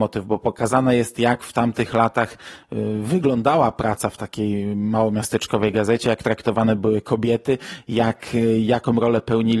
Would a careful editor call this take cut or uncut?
uncut